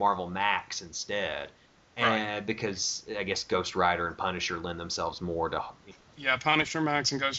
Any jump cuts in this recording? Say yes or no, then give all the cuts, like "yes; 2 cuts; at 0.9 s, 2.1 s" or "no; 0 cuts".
no; 0 cuts